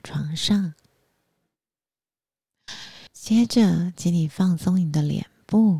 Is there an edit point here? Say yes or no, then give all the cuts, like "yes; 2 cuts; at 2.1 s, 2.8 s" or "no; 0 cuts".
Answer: yes; 1 cut; at 3.1 s